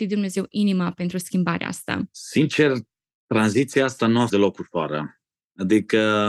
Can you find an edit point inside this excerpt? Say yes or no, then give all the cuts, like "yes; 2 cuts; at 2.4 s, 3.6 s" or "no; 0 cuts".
yes; 1 cut; at 4.3 s